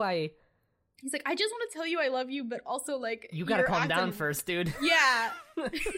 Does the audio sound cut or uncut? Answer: uncut